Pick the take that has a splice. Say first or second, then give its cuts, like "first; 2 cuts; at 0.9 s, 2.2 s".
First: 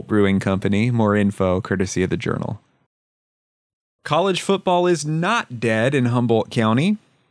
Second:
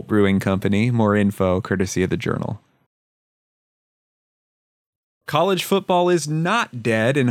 first; 1 cut; at 3.7 s